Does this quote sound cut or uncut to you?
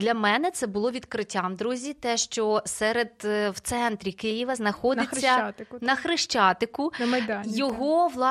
uncut